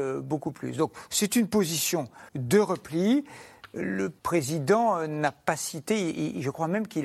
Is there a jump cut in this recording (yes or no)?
yes